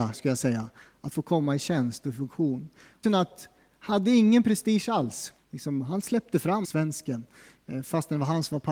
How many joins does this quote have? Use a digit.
3